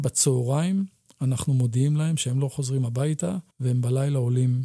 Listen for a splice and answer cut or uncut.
cut